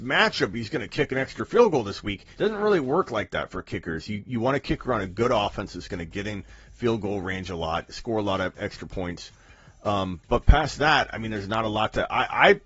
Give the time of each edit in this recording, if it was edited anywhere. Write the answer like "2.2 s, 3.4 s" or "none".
2.3 s